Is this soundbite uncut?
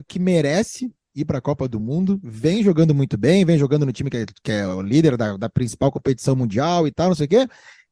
yes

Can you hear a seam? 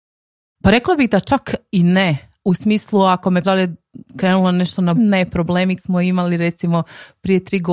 yes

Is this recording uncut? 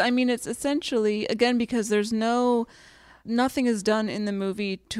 yes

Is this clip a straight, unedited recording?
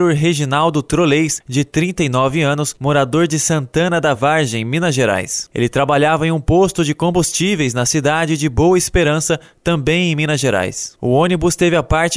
yes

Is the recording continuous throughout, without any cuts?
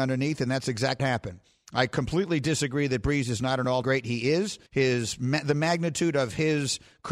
no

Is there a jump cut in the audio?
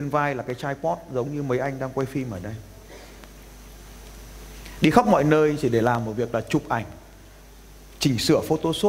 no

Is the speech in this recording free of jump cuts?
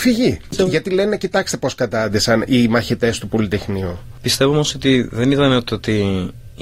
yes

